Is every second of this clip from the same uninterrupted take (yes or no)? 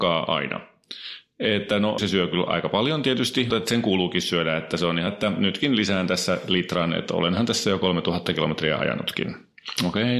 no